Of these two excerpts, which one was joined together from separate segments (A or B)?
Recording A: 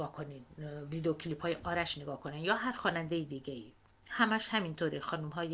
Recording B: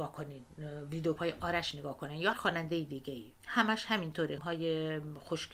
B